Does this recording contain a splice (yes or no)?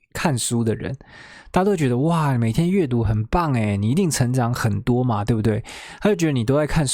no